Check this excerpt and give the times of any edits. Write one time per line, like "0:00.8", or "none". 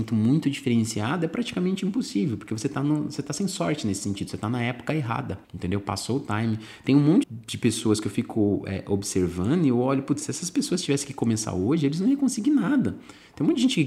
0:05.4
0:07.2